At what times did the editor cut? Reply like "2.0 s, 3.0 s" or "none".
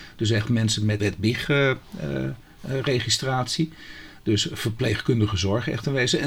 1.0 s